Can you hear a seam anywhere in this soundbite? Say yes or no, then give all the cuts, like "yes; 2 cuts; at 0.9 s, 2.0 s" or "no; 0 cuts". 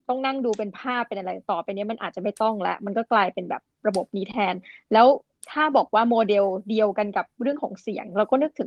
no; 0 cuts